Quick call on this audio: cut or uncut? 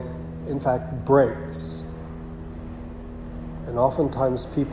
uncut